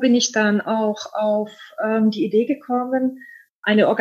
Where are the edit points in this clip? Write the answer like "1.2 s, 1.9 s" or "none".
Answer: none